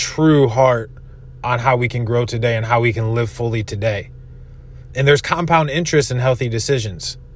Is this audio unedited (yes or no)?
yes